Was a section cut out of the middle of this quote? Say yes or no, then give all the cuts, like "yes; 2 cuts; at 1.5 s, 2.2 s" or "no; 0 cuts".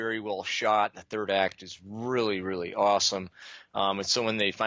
no; 0 cuts